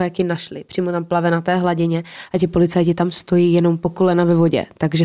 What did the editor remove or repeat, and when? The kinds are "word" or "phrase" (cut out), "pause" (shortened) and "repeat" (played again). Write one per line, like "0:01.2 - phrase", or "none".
none